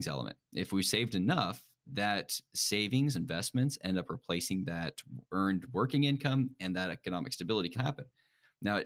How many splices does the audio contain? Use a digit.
4